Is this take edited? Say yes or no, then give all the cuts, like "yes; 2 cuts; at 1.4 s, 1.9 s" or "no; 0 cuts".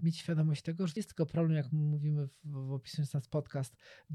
yes; 1 cut; at 1.0 s